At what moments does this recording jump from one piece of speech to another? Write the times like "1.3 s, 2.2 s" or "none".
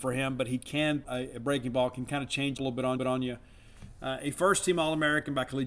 1.0 s, 2.6 s, 3.0 s